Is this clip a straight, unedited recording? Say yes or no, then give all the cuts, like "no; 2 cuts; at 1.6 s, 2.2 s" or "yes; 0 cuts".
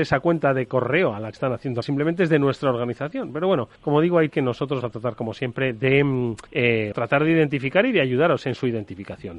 no; 7 cuts; at 1.3 s, 1.8 s, 3.8 s, 4.3 s, 4.8 s, 6.5 s, 6.9 s